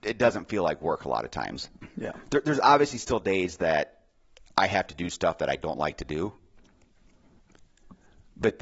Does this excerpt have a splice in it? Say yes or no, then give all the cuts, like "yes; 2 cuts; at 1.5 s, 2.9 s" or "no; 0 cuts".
no; 0 cuts